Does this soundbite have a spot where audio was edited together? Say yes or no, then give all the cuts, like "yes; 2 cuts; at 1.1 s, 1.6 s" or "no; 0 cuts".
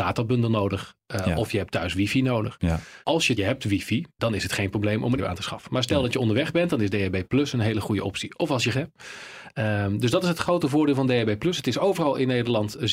yes; 5 cuts; at 3.0 s, 3.4 s, 4.2 s, 5.2 s, 8.7 s